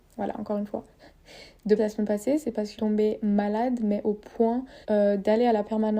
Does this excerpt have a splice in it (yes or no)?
yes